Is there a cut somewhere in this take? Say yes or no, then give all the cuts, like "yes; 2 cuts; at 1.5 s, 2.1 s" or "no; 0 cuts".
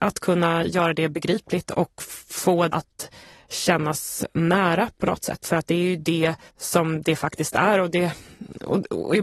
yes; 2 cuts; at 2.7 s, 6.5 s